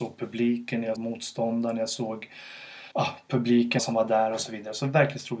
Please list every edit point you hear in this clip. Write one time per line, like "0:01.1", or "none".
0:01.0
0:02.9
0:03.8